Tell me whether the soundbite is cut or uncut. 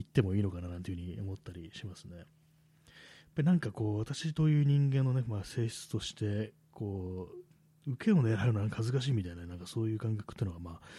uncut